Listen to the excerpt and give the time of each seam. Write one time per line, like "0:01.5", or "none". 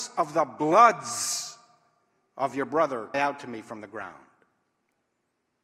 0:03.1

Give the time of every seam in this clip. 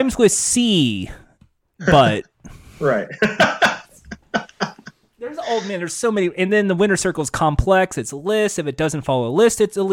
0:02.3

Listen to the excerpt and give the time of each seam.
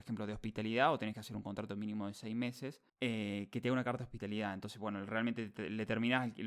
0:02.9

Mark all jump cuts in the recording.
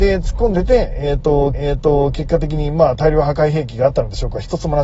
0:01.5

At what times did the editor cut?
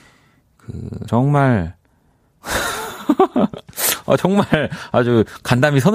0:01.1

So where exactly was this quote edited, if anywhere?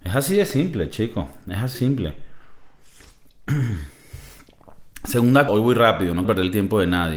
0:01.7
0:05.5
0:06.2

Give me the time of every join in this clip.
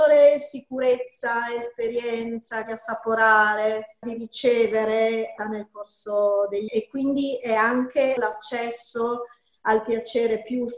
0:02.6
0:04.0
0:05.4
0:06.7
0:08.2

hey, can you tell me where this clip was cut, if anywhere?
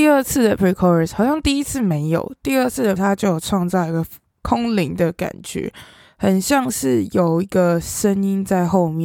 0:03.0

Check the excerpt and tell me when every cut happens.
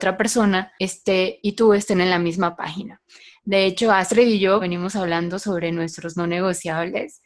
0:04.6

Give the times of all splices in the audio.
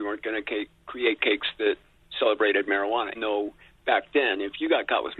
0:03.1

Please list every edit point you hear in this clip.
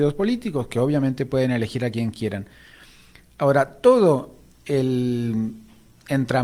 none

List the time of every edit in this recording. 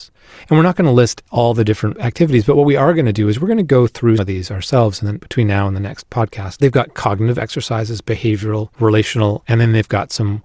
0:04.2

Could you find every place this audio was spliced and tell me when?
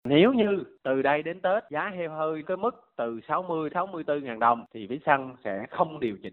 0:02.4
0:03.7

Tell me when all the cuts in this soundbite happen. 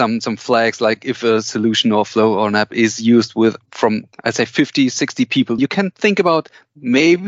0:04.1
0:05.6

